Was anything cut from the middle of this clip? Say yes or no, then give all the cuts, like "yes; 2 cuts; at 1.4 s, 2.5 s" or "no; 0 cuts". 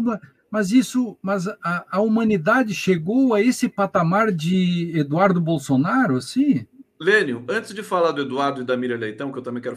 yes; 1 cut; at 6.9 s